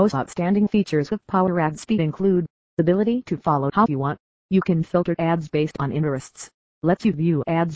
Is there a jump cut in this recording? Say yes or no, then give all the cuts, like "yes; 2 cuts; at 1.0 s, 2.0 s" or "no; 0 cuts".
yes; 1 cut; at 3.9 s